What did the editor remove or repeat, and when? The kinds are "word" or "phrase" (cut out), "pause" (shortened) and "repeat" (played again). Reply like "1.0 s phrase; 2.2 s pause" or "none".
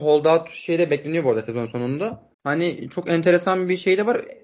2.3 s pause